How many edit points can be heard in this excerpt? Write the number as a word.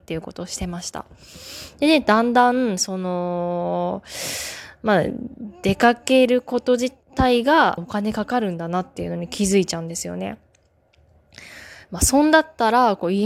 two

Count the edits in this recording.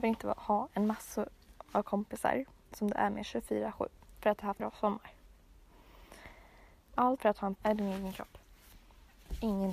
three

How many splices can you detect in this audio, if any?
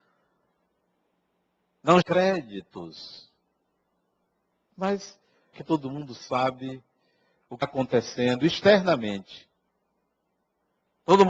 three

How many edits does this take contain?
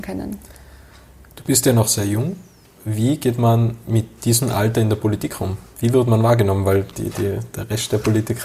zero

